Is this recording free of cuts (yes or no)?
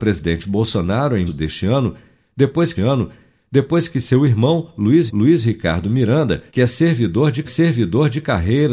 no